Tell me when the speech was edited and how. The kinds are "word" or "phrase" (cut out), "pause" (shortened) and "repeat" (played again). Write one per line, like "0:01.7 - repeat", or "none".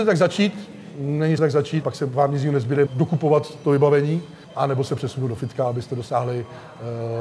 0:01.4 - phrase
0:01.8 - word
0:02.9 - word
0:04.4 - pause